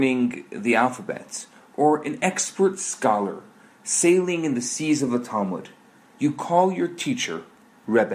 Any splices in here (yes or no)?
no